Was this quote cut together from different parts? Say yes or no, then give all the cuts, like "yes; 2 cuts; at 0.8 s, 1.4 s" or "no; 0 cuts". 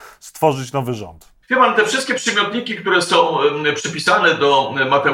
yes; 1 cut; at 1.4 s